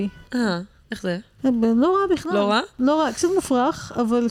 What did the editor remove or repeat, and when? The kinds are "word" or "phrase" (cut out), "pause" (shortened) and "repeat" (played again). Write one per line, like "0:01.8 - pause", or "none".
none